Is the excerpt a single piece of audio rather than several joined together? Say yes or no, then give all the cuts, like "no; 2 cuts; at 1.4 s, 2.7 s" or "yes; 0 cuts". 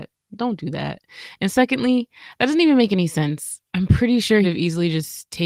no; 2 cuts; at 3.7 s, 4.4 s